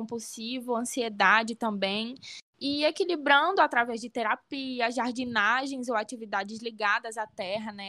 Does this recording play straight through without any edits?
yes; 0 cuts

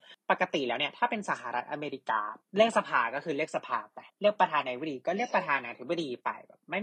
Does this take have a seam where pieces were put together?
yes; 2 cuts; at 2.4 s, 4.1 s

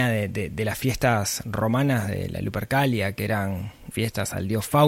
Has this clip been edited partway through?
yes; 1 cut; at 3.9 s

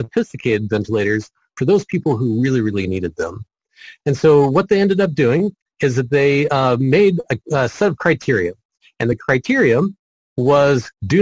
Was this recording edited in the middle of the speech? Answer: no; 0 cuts

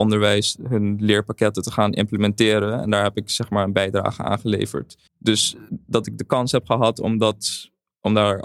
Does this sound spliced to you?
yes; 1 cut; at 5.1 s

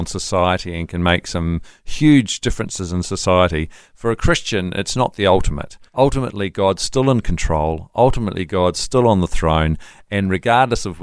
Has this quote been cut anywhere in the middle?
yes; 1 cut; at 5.9 s

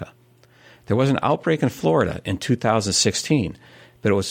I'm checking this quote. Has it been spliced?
no; 0 cuts

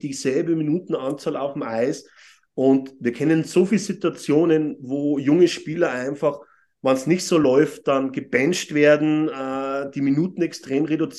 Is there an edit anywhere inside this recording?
no; 0 cuts

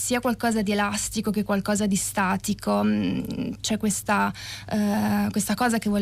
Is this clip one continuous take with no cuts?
yes; 0 cuts

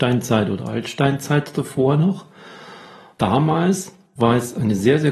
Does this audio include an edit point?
no; 0 cuts

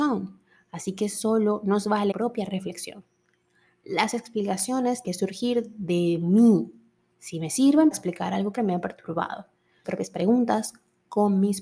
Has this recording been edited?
yes; 5 cuts; at 2.1 s, 5.0 s, 7.9 s, 8.6 s, 9.8 s

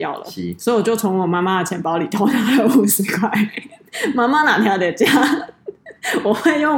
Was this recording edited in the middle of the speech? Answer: no; 0 cuts

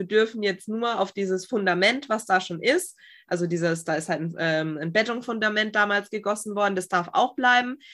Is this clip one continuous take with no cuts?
yes; 0 cuts

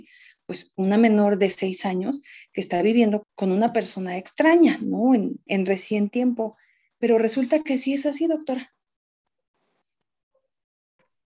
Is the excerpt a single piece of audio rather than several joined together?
no; 2 cuts; at 3.2 s, 5.5 s

